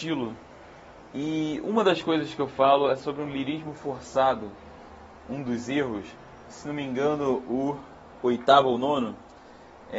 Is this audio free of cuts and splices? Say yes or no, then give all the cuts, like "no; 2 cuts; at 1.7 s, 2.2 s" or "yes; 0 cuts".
yes; 0 cuts